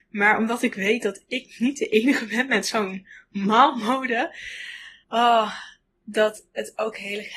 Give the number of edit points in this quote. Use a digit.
1